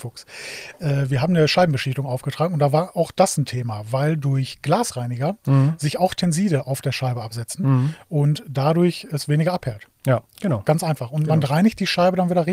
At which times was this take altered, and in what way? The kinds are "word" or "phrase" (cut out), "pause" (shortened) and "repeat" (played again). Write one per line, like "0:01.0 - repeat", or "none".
0:10.3 - pause